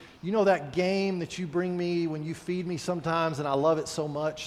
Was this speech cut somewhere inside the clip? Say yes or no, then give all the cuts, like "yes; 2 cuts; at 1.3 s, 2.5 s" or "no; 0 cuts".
no; 0 cuts